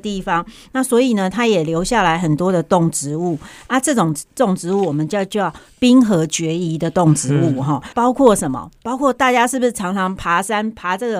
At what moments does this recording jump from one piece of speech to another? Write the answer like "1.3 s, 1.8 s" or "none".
7.9 s